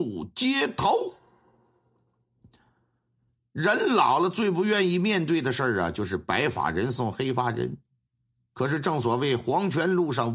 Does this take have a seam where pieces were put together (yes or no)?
no